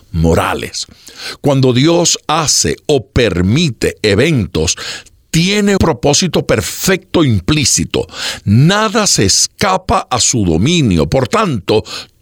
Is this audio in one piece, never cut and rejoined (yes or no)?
no